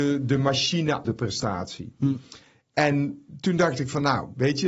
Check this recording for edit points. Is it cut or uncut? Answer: cut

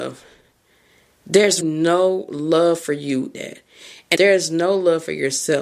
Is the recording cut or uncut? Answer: cut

